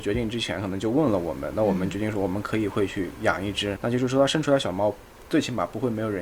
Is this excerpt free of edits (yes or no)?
no